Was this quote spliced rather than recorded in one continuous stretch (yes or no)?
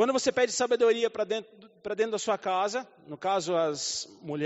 no